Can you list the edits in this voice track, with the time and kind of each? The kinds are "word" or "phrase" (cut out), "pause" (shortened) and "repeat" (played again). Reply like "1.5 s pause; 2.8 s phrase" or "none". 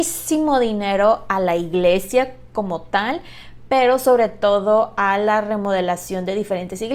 none